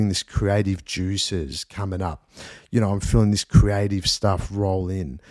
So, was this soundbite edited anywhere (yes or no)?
no